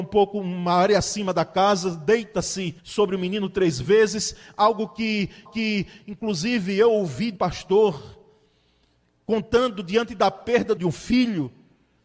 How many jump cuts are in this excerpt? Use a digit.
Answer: 4